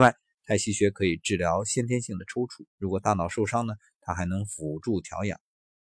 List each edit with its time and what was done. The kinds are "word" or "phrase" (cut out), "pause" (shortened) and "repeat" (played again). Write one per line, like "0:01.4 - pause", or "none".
0:02.7 - pause